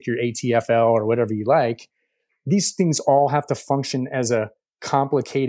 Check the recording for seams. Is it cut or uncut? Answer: uncut